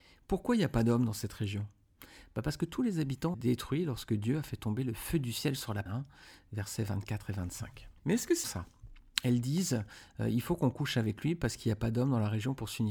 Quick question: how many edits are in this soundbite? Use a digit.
4